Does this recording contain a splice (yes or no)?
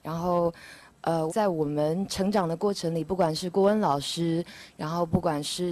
yes